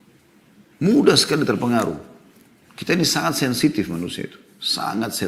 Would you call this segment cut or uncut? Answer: uncut